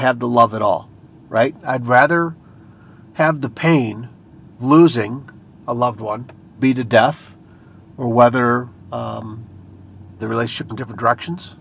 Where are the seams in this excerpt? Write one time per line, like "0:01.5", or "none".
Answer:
0:04.6
0:06.6
0:10.2
0:10.7